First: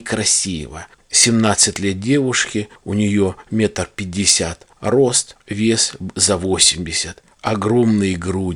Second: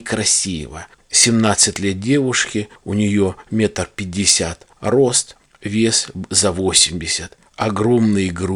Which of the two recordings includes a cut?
first; 1 cut; at 5.4 s

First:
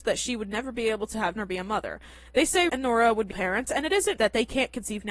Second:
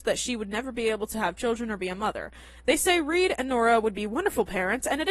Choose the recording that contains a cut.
first; 4 cuts; at 1.4 s, 2.7 s, 3.3 s, 4.2 s

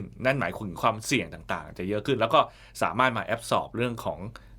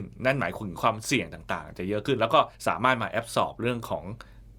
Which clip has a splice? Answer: second; 1 cut; at 2.5 s

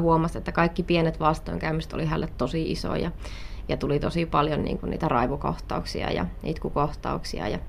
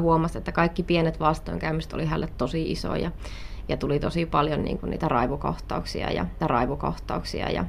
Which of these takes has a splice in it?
second; 1 cut; at 6.4 s

